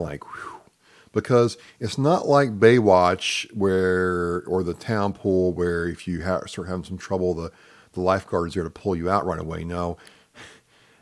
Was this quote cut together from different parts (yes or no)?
no